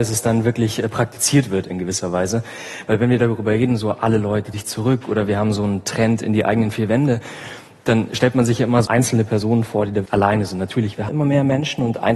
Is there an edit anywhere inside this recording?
yes; 4 cuts; at 4.5 s, 8.9 s, 10.1 s, 11.1 s

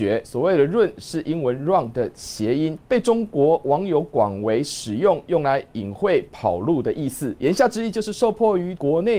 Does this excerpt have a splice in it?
no; 0 cuts

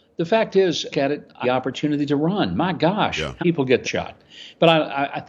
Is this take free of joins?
no; 4 cuts; at 0.9 s, 1.4 s, 3.4 s, 3.8 s

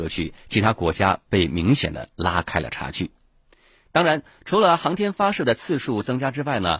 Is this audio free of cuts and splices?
yes; 0 cuts

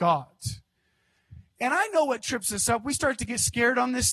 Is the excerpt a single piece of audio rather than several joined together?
yes; 0 cuts

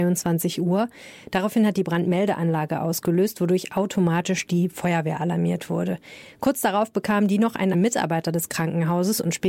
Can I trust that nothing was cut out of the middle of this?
no; 1 cut; at 7.7 s

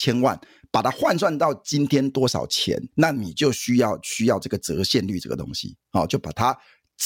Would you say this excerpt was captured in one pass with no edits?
no; 1 cut; at 2.9 s

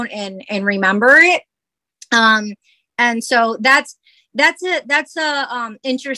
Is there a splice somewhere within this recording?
no; 0 cuts

